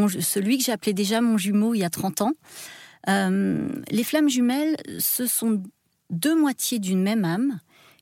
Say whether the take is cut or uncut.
uncut